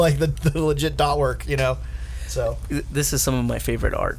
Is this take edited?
no; 0 cuts

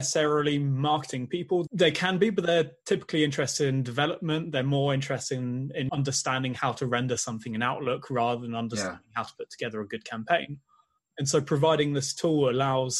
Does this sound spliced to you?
no; 0 cuts

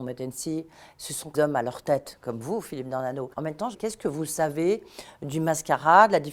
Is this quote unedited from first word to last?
no; 3 cuts; at 1.3 s, 3.3 s, 3.7 s

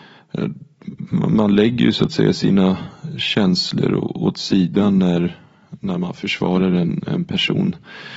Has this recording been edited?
no; 0 cuts

